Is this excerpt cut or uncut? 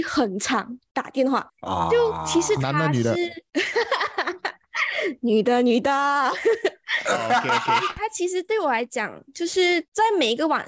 cut